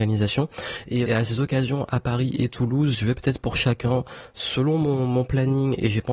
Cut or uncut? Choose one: cut